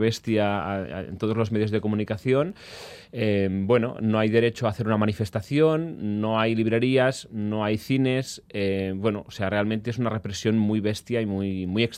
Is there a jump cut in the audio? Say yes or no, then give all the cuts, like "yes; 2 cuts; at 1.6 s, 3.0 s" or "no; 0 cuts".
no; 0 cuts